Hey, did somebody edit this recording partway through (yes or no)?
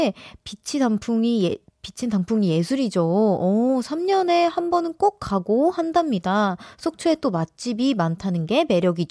no